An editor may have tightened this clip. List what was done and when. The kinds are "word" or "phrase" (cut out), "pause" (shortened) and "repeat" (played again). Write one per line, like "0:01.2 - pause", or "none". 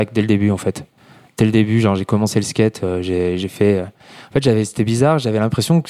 none